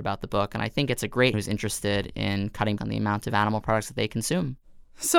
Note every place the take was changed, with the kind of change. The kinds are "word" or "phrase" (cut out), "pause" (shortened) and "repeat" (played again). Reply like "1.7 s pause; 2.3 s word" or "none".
1.3 s phrase; 2.8 s word